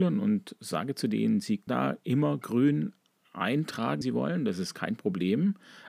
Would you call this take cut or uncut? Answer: cut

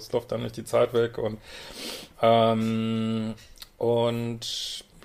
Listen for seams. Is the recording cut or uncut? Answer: cut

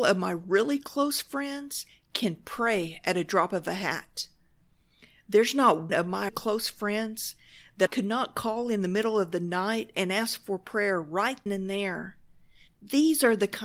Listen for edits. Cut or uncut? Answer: cut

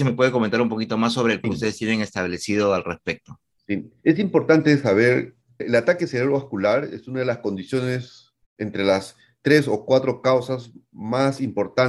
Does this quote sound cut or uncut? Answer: cut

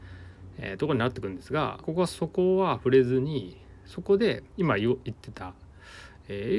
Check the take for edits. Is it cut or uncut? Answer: cut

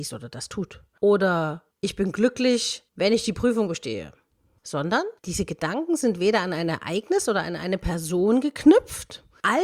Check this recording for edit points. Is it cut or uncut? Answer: cut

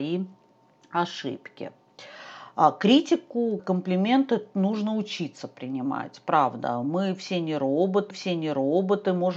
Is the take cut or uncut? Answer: cut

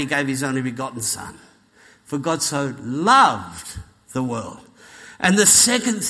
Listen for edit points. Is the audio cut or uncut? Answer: uncut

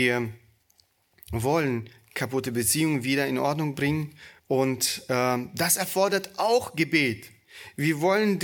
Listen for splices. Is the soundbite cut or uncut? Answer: cut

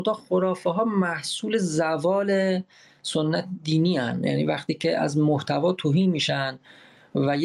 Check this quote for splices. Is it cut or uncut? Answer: uncut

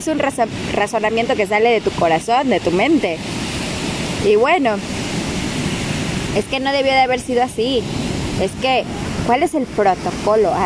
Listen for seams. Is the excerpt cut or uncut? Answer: uncut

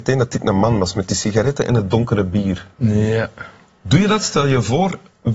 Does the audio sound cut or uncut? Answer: cut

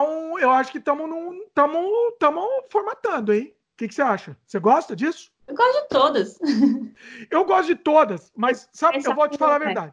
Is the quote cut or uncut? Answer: cut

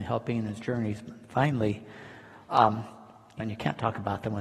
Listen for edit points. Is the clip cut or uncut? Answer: cut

